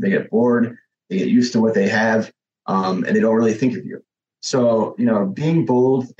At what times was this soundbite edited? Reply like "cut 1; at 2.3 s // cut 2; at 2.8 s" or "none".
none